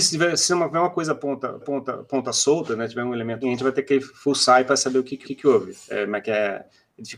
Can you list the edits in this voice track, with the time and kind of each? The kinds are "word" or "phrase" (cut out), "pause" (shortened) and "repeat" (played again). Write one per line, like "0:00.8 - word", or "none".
0:01.6 - repeat
0:03.4 - word
0:05.2 - repeat